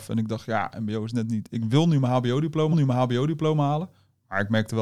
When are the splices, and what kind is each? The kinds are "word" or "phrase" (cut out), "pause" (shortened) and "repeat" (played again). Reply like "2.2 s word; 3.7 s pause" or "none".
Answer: 2.7 s repeat